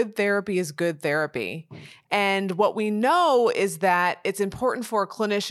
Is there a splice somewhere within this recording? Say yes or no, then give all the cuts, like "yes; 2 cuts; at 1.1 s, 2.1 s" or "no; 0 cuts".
no; 0 cuts